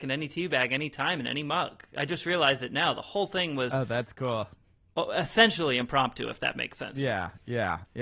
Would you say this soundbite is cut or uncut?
uncut